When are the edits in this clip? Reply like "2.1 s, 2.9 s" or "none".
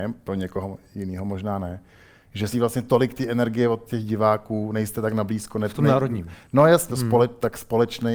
2.5 s, 6.9 s

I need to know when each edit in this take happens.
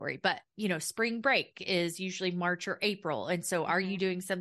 none

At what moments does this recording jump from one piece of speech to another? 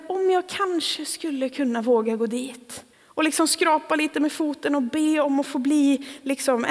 2.9 s

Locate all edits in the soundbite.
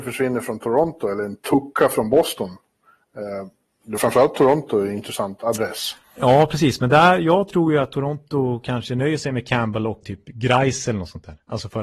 4.0 s, 6.0 s, 10.0 s

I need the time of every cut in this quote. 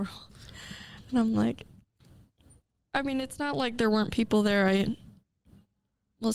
none

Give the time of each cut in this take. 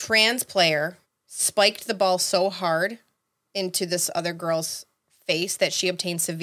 1.0 s

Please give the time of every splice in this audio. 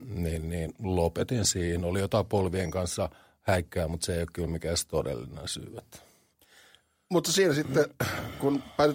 none

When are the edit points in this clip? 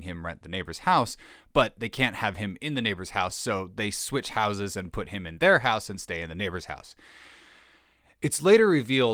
none

